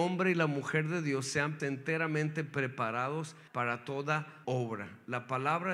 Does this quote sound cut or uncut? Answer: cut